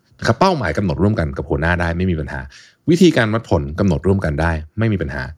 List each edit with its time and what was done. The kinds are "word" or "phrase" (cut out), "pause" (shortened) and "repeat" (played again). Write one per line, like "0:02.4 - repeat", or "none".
none